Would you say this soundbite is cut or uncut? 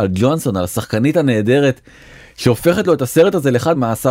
uncut